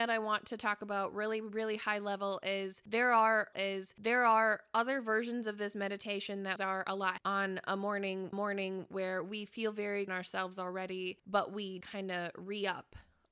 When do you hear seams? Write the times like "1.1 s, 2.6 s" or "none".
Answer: 3.5 s, 6.6 s, 7.2 s, 8.3 s, 10.1 s, 11.8 s